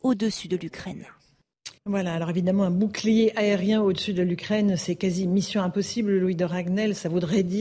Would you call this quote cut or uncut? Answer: cut